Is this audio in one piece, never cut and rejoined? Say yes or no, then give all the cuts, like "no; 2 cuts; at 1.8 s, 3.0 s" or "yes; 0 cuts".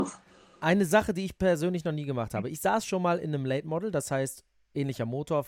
yes; 0 cuts